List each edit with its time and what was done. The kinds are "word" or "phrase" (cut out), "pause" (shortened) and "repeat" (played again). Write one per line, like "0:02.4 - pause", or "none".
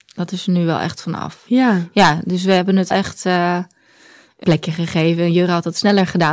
0:02.9 - word
0:04.4 - word